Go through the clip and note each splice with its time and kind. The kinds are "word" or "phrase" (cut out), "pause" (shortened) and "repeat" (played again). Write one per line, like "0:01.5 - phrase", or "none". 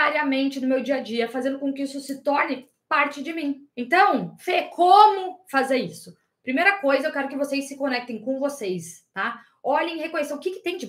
0:03.7 - pause